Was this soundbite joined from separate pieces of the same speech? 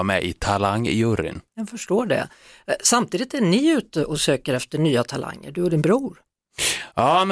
no; 0 cuts

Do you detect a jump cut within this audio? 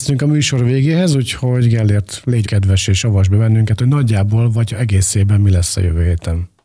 yes; 1 cut; at 2.4 s

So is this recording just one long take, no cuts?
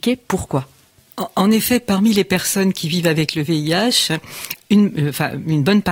yes; 0 cuts

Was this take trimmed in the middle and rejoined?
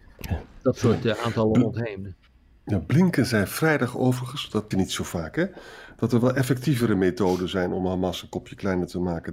yes; 1 cut; at 4.7 s

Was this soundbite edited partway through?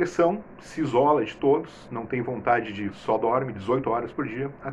yes; 1 cut; at 2.9 s

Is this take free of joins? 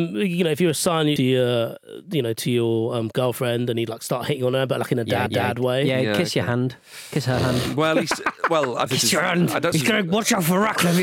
no; 4 cuts; at 1.2 s, 5.3 s, 8.9 s, 9.7 s

